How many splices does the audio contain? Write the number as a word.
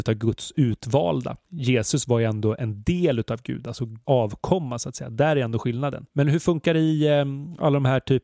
three